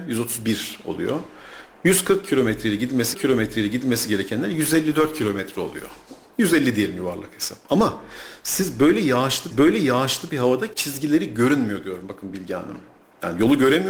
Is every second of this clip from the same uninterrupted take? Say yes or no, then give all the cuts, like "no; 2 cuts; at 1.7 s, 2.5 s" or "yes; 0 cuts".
no; 3 cuts; at 3.1 s, 9.5 s, 10.7 s